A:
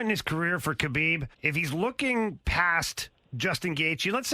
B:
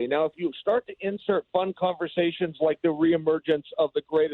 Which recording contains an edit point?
A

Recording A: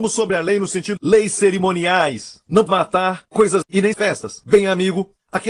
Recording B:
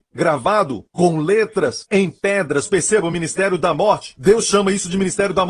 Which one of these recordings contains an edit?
A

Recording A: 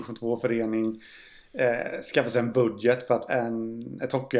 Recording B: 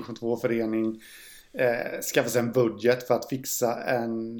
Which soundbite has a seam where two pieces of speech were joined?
A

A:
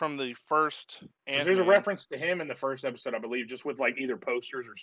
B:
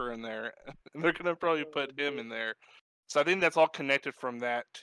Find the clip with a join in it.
A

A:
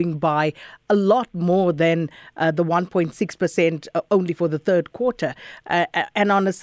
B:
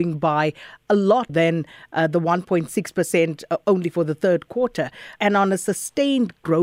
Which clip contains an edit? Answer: B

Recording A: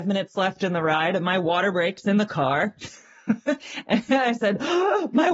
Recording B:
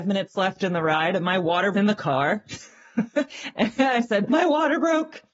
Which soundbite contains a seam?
B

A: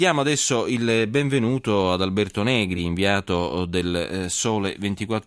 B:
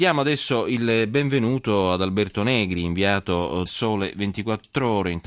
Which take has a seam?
B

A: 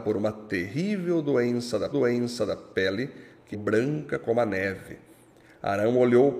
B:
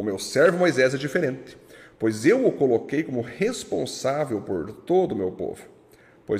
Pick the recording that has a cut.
A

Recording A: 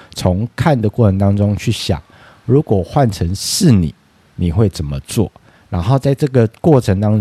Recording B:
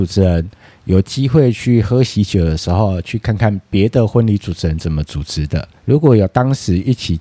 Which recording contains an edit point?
B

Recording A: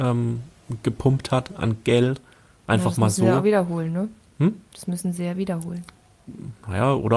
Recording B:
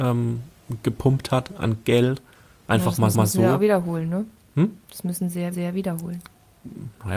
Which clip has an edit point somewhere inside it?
B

